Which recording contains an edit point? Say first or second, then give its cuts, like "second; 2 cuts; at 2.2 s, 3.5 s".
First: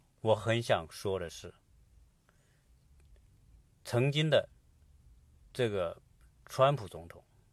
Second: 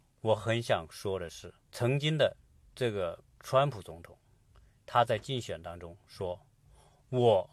second; 3 cuts; at 1.6 s, 2.5 s, 3.3 s